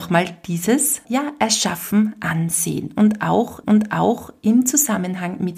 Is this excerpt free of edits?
no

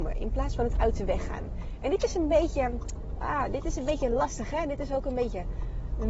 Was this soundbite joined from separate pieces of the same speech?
no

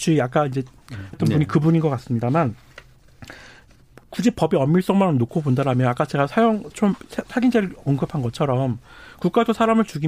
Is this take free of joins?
no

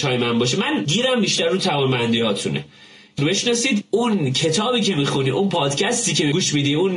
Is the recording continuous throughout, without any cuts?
no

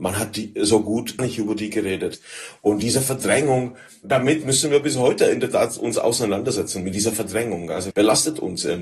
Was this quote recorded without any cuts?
no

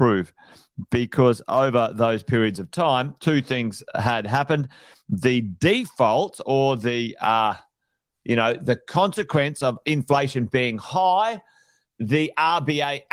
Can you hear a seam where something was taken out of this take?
no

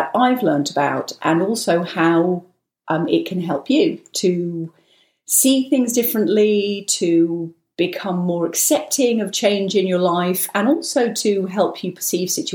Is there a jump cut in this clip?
no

